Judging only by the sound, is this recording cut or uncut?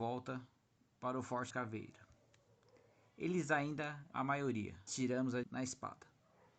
cut